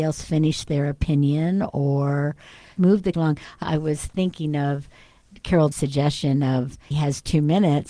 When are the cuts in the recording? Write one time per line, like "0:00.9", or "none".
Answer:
0:02.8
0:03.1
0:03.6
0:05.7
0:06.9